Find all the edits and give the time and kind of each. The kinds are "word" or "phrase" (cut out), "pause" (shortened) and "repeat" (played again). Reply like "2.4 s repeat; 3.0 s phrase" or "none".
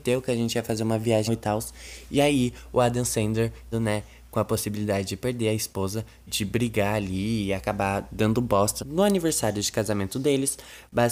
1.3 s word; 3.7 s word; 6.3 s word; 8.8 s word